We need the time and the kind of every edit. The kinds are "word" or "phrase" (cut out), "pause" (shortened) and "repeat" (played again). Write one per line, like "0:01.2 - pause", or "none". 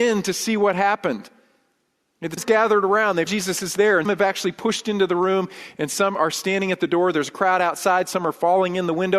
0:02.4 - word
0:03.3 - word
0:04.0 - word